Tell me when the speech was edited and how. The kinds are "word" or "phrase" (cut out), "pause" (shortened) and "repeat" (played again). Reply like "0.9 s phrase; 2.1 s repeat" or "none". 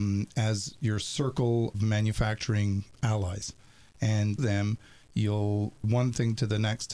1.7 s word; 4.4 s word; 5.8 s word